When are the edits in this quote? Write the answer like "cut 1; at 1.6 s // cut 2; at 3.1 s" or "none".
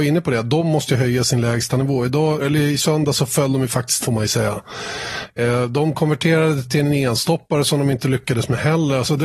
cut 1; at 2.4 s // cut 2; at 4.0 s